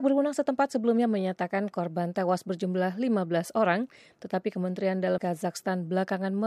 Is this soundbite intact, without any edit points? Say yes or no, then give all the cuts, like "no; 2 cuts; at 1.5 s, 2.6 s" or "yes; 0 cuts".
no; 1 cut; at 5.2 s